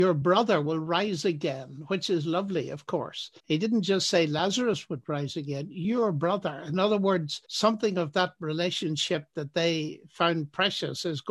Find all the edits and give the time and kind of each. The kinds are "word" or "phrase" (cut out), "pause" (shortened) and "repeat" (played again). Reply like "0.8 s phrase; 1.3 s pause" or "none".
3.4 s pause; 7.4 s pause